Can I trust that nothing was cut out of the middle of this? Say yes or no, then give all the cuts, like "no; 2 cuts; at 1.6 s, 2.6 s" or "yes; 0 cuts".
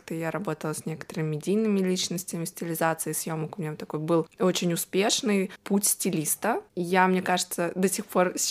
yes; 0 cuts